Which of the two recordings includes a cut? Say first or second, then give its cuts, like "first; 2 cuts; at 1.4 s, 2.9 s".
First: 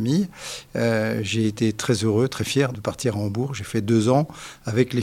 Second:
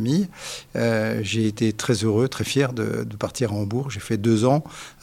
first; 1 cut; at 2.7 s